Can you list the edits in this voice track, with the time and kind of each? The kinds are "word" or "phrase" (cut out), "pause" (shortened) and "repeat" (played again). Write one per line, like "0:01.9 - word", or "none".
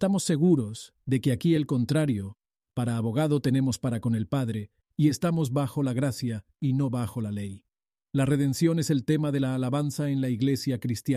none